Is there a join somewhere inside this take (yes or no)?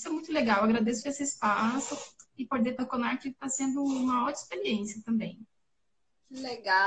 yes